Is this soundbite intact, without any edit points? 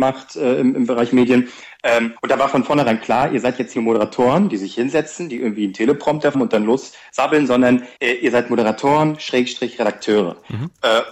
no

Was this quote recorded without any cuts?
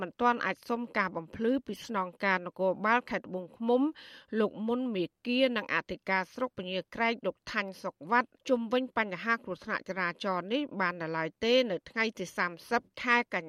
no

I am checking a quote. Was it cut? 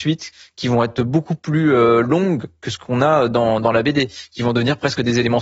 no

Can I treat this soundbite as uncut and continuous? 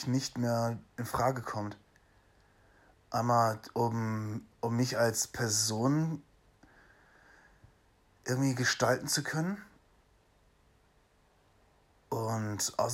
yes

